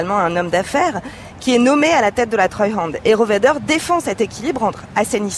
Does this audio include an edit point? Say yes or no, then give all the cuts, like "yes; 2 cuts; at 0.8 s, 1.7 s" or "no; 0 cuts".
no; 0 cuts